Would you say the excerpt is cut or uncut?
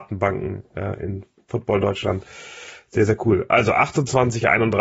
uncut